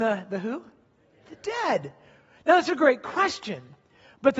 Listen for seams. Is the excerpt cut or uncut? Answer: uncut